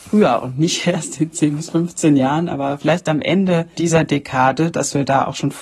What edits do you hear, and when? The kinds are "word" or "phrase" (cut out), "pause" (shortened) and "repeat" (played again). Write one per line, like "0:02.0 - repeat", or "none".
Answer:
0:03.8 - word